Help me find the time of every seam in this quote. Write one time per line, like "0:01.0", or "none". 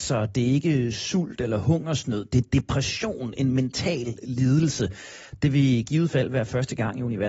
none